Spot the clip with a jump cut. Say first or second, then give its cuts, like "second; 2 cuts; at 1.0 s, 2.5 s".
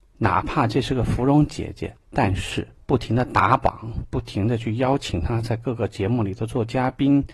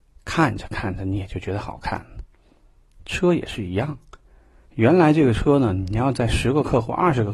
first; 2 cuts; at 2.0 s, 2.7 s